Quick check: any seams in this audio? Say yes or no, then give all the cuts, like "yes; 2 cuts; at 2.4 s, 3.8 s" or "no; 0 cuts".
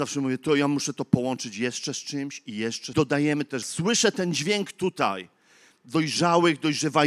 yes; 2 cuts; at 2.9 s, 3.6 s